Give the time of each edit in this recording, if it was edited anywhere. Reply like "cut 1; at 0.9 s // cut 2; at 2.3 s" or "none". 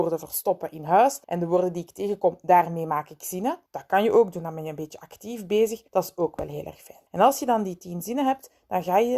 cut 1; at 1.2 s // cut 2; at 3.7 s // cut 3; at 5.9 s // cut 4; at 7.1 s